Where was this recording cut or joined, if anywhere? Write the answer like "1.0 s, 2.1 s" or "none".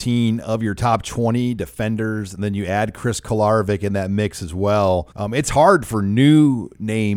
5.1 s